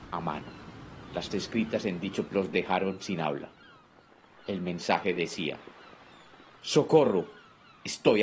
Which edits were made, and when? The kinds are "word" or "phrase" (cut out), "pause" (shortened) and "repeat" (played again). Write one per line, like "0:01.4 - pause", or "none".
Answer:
0:01.3 - word
0:02.3 - word